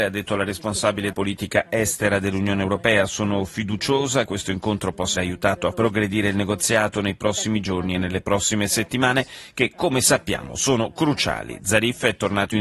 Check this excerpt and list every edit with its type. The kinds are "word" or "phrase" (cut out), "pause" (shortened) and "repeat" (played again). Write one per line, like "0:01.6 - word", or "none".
0:01.1 - word
0:04.3 - word
0:05.2 - word
0:05.7 - word